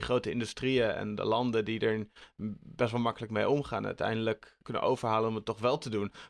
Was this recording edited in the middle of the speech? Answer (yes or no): yes